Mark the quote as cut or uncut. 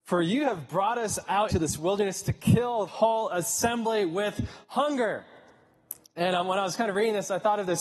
cut